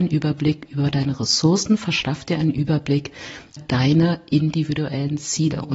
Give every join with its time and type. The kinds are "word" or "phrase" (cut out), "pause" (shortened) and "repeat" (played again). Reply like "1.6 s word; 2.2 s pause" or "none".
3.6 s word